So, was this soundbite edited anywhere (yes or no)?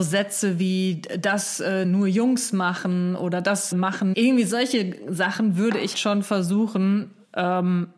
yes